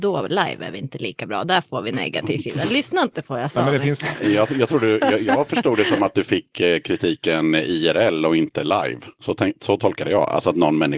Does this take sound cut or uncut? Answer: uncut